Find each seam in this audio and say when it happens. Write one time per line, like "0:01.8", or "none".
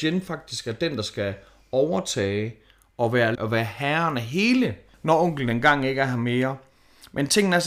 0:03.3
0:04.9